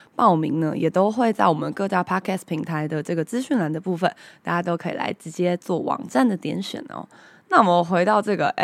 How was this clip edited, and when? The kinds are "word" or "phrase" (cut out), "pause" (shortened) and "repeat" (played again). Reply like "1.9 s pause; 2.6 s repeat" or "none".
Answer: none